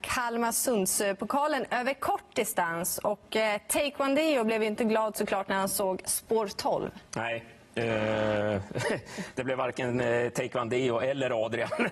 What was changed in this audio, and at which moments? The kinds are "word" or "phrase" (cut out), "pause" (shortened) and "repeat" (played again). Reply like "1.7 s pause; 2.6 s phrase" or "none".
7.1 s pause